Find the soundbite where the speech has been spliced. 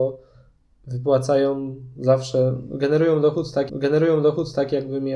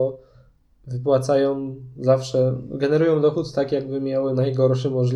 first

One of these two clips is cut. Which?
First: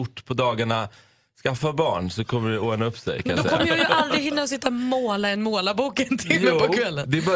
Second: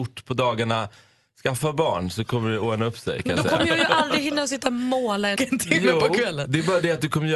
second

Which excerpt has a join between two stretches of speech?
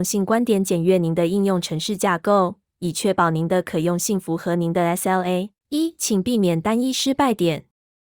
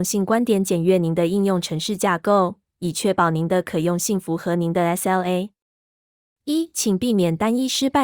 first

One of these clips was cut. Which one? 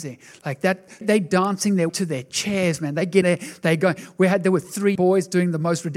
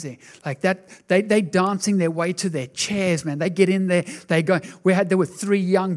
first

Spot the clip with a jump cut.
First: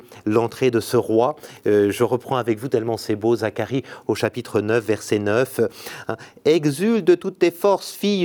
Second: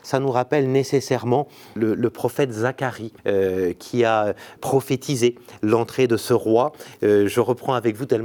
second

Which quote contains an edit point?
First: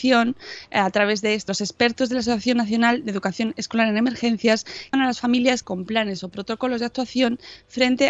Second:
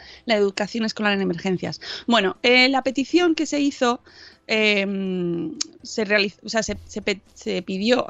first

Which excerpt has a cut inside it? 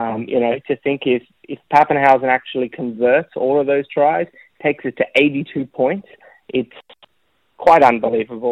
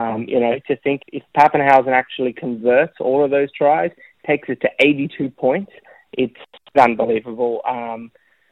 second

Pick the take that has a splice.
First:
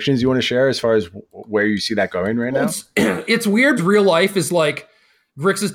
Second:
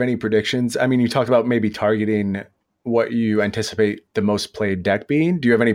first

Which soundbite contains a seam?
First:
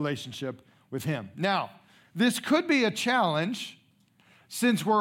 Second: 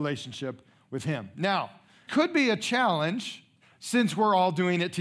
second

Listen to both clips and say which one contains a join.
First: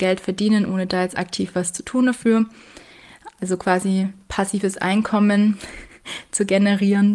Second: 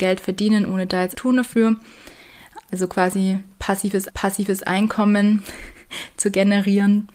second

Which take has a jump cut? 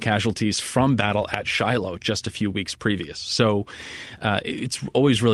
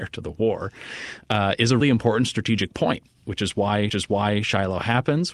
second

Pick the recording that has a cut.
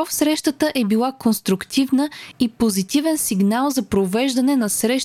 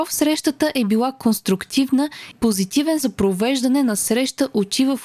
second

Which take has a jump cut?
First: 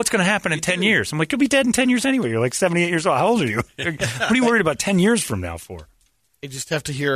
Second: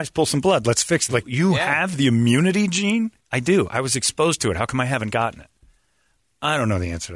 second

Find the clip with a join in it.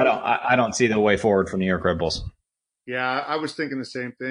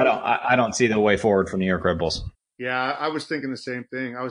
second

